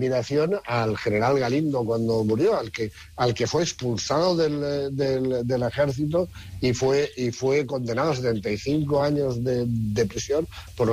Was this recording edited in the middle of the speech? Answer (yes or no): no